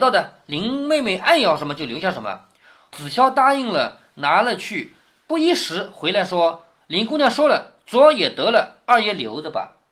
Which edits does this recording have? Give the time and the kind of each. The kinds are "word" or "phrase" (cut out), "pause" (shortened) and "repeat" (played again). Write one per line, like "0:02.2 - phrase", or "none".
none